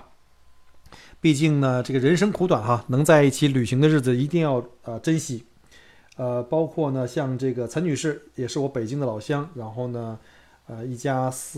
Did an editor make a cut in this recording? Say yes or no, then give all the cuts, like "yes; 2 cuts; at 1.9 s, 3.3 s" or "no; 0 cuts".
no; 0 cuts